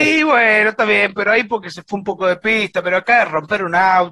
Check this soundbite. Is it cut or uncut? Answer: uncut